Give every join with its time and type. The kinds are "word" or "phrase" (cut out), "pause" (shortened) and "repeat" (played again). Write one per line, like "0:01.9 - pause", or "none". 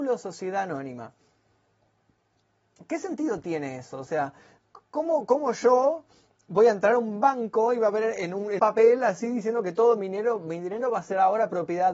0:08.6 - word